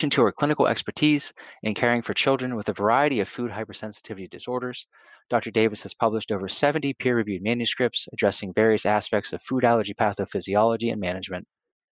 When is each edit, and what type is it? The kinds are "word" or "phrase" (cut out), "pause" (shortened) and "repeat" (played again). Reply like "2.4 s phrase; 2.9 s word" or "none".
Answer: none